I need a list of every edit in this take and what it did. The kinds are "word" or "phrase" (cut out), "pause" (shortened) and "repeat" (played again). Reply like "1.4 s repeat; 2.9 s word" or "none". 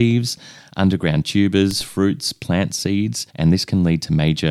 3.3 s pause